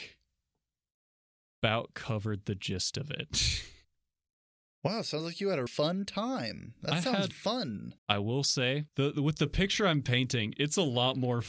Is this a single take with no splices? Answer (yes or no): no